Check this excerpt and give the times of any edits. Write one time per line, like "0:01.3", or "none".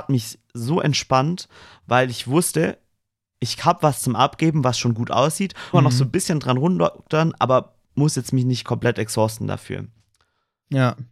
0:05.7
0:07.8

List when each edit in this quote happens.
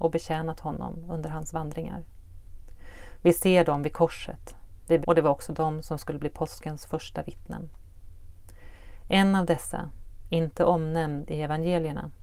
0:05.0

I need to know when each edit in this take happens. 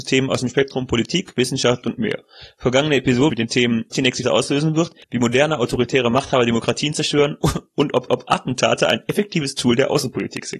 0:01.8
0:03.3
0:03.9
0:04.2
0:05.0
0:08.1

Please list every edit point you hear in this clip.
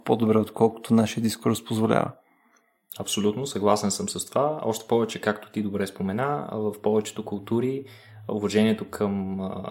none

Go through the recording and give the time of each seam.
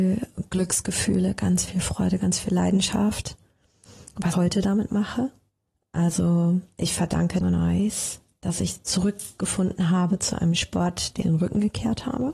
0:04.3
0:07.4
0:11.2

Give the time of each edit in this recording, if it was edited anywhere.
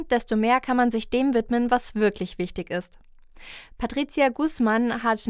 none

